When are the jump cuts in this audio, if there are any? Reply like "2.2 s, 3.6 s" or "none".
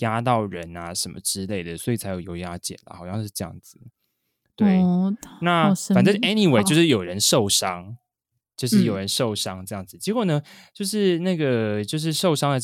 none